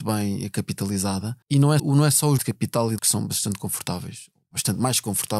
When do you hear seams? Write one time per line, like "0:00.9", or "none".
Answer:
0:01.4
0:01.8
0:02.4
0:03.0

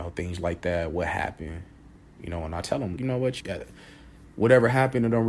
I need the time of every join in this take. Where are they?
0:03.0
0:03.4

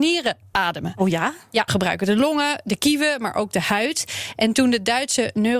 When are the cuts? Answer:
0:01.7

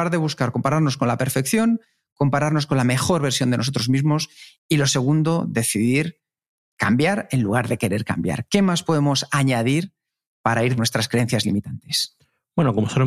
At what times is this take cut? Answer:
0:10.8

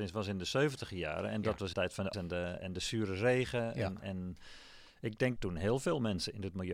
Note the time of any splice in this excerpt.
0:01.7
0:02.1
0:02.6
0:04.9
0:05.4

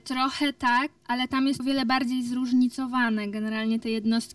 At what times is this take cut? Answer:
0:01.0
0:01.6

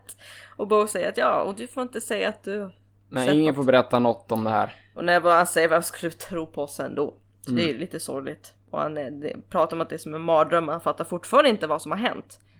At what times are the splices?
none

